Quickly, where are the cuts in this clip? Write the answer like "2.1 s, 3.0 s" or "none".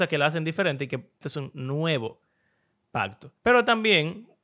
1.2 s, 3.4 s